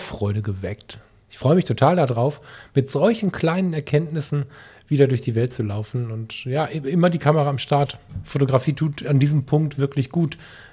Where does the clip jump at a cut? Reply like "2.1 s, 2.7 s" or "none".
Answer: none